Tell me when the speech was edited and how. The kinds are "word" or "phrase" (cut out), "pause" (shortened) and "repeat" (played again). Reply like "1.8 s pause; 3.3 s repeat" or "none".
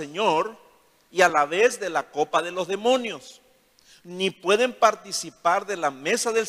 none